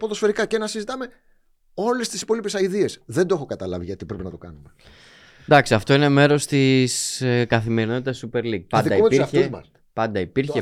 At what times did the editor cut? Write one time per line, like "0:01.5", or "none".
none